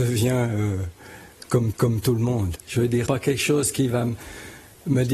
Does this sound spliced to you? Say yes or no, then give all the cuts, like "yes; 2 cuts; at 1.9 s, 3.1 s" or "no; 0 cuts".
yes; 3 cuts; at 1.7 s, 2.6 s, 3.1 s